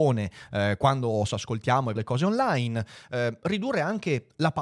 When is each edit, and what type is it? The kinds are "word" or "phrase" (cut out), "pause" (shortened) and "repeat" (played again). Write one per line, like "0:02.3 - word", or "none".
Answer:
0:01.3 - word
0:02.0 - word